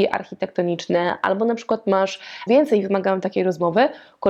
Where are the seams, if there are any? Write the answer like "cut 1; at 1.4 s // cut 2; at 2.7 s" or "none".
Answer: cut 1; at 2.5 s